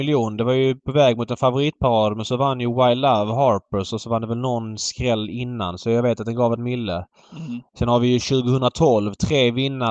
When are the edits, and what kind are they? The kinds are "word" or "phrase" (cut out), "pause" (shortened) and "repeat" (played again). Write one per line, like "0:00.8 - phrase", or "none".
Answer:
0:06.6 - word